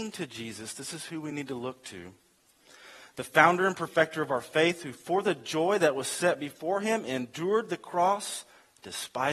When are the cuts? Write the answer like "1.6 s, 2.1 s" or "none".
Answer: none